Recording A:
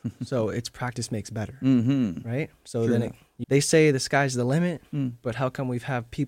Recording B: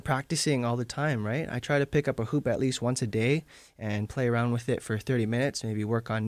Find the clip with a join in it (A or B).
A